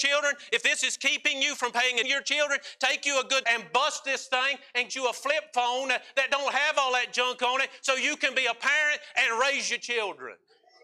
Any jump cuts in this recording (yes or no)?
yes